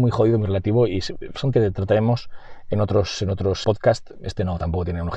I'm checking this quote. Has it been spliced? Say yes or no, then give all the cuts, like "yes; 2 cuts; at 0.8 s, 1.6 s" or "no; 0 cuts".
yes; 2 cuts; at 1.5 s, 3.6 s